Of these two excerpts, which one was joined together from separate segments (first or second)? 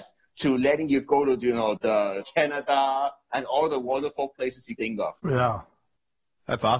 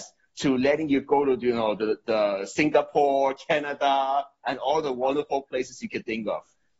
first